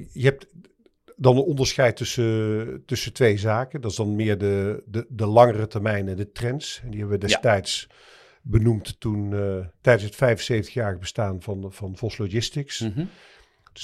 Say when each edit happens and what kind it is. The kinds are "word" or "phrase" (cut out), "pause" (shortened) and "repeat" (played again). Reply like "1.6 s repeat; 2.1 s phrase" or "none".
none